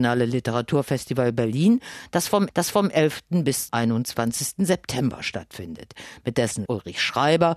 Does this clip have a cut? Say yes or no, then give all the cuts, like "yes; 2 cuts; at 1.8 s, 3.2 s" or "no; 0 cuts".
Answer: yes; 3 cuts; at 2.5 s, 3.7 s, 6.7 s